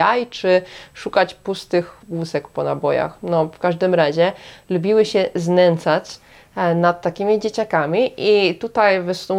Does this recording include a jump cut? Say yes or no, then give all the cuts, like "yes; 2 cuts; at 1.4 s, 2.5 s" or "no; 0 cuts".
yes; 1 cut; at 2.0 s